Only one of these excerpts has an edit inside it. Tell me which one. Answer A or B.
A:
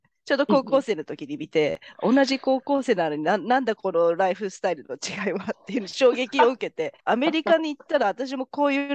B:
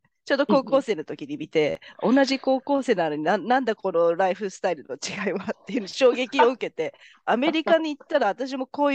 A